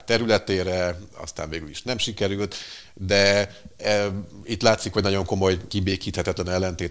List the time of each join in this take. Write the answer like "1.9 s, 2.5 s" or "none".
none